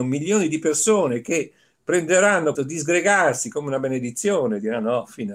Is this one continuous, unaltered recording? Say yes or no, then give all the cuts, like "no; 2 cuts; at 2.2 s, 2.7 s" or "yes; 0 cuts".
no; 1 cut; at 2.5 s